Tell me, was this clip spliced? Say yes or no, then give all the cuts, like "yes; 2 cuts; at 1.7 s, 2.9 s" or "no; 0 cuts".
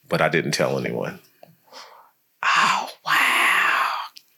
no; 0 cuts